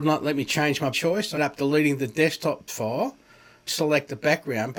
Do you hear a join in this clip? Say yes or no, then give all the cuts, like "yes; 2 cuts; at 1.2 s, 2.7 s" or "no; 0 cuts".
yes; 4 cuts; at 0.9 s, 1.4 s, 2.7 s, 3.7 s